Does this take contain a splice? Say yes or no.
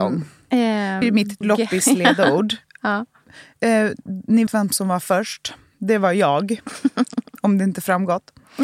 yes